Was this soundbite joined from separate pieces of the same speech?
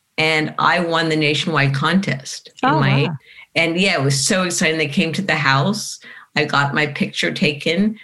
no; 0 cuts

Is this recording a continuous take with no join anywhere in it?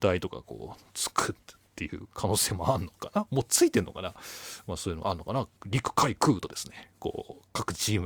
no; 1 cut; at 5.6 s

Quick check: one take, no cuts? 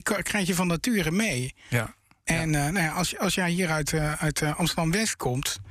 yes; 0 cuts

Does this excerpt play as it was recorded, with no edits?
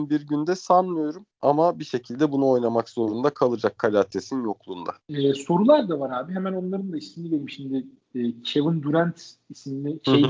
no; 2 cuts; at 1.3 s, 5.0 s

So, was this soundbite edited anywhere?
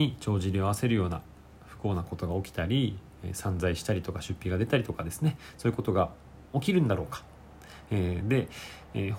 no; 0 cuts

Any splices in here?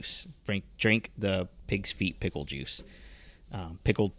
no; 0 cuts

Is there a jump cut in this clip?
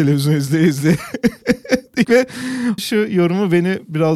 yes; 2 cuts; at 2.0 s, 2.8 s

